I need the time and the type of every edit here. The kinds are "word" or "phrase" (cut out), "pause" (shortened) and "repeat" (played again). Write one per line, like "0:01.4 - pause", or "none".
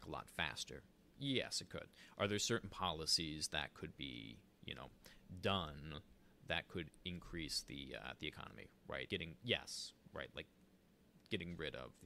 0:09.1 - word